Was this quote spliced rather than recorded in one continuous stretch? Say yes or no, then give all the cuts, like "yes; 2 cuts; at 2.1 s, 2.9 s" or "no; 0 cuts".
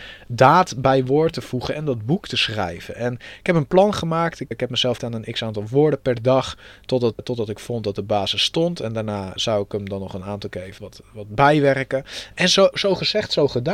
yes; 6 cuts; at 4.5 s, 5.0 s, 7.2 s, 9.4 s, 10.8 s, 12.7 s